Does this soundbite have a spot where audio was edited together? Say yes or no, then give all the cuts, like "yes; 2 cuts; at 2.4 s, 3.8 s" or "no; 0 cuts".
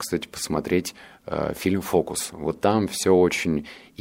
no; 0 cuts